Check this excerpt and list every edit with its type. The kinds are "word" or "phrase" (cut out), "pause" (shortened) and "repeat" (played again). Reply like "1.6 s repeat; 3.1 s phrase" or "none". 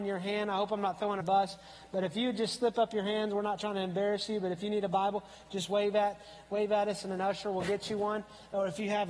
1.2 s phrase